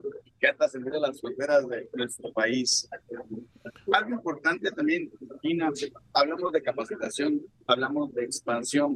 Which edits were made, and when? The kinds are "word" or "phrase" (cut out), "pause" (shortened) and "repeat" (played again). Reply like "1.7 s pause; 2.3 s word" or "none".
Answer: none